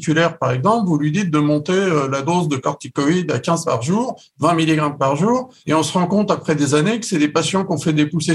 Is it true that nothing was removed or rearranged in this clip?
no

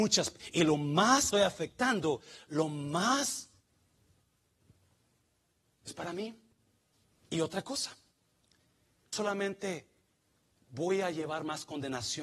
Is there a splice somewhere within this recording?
yes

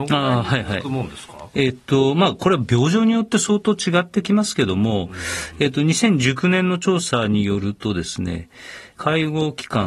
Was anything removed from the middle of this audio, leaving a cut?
no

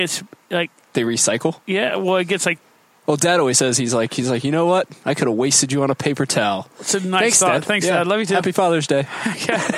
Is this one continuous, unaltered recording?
yes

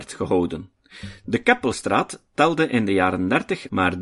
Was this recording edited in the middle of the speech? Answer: no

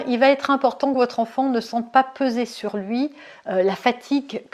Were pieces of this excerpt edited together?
no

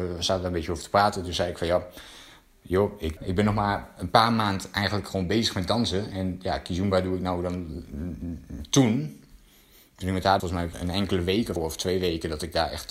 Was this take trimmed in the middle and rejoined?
yes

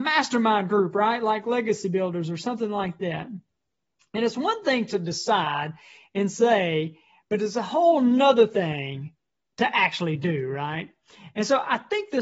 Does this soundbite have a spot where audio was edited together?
no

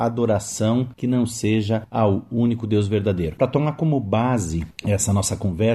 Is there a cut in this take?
no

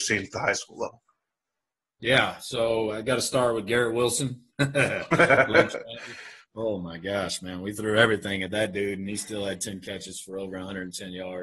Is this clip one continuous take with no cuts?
yes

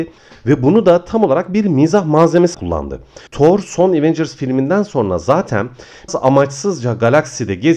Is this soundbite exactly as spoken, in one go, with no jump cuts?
no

